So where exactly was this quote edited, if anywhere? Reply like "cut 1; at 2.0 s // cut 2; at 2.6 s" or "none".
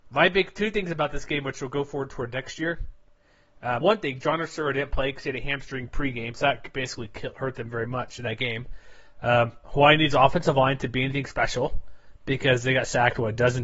cut 1; at 3.8 s